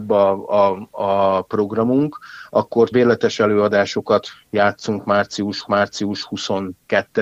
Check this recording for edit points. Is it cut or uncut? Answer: cut